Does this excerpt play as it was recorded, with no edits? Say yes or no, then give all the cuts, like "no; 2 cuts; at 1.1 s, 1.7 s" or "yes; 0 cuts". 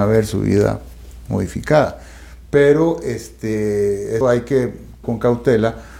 no; 2 cuts; at 4.2 s, 5.0 s